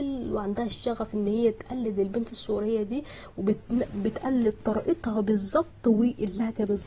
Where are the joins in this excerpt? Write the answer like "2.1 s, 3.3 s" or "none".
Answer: none

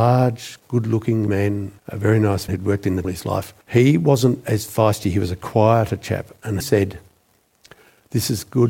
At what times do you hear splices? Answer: 1.3 s, 1.8 s, 2.5 s, 3.0 s, 3.6 s, 6.6 s

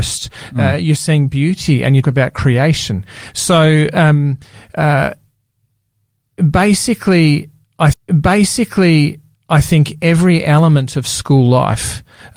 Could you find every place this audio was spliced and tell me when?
2.0 s, 7.9 s

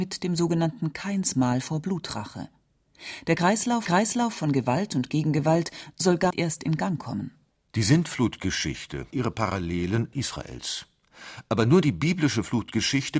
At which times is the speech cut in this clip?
3.9 s, 6.3 s, 7.5 s, 9.1 s, 10.1 s

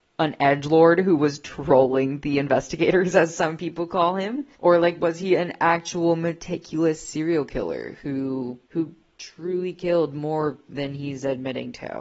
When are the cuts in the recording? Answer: 4.5 s, 8.6 s

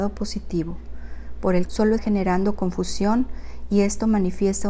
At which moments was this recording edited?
1.6 s, 2.0 s

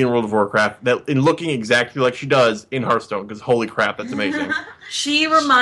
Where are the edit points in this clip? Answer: none

